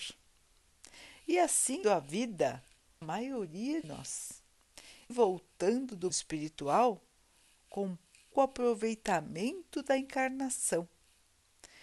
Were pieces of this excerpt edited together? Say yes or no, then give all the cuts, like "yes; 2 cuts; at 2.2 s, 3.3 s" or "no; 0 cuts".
yes; 6 cuts; at 1.8 s, 3.0 s, 3.8 s, 5.1 s, 6.1 s, 8.3 s